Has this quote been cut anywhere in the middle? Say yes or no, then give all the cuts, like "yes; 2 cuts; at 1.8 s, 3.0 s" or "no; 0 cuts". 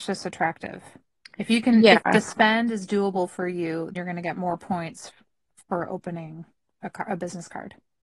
yes; 1 cut; at 3.9 s